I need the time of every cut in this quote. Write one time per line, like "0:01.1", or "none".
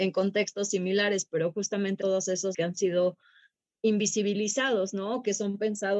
0:02.0
0:02.5